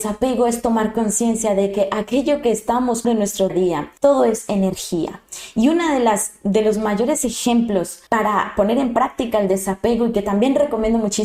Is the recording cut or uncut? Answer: cut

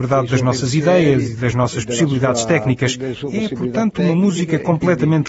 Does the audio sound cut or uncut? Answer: uncut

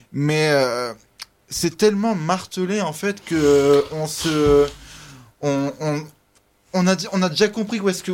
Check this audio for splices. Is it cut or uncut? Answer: uncut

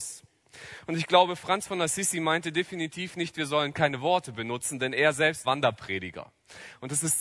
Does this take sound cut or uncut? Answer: cut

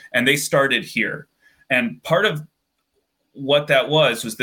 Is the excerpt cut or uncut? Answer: uncut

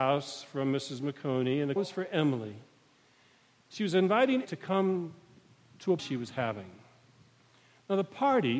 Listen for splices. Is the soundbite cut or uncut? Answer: cut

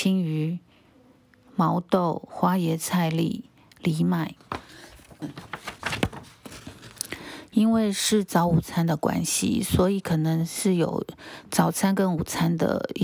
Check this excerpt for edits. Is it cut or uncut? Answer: uncut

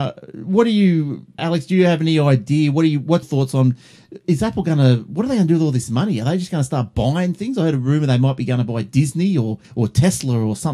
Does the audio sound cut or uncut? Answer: cut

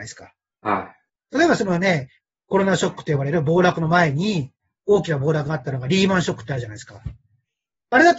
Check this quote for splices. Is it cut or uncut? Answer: uncut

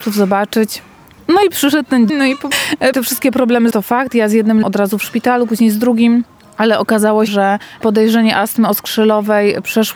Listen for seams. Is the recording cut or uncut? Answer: cut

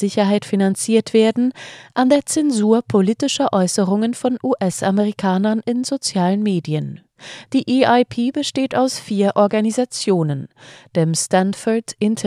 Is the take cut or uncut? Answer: uncut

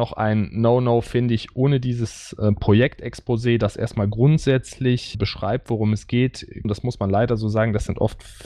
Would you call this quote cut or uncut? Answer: cut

